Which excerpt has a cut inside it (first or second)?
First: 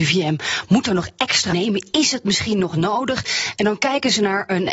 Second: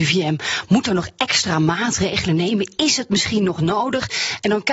first